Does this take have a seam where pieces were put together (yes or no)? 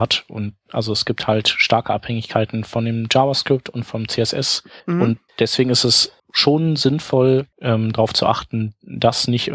yes